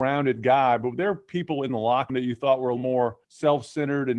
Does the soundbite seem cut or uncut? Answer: cut